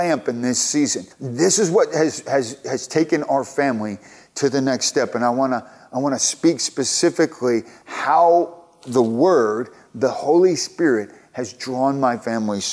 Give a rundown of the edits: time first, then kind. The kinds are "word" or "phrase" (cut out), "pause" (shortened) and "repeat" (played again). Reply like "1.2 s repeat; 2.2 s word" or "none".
1.1 s pause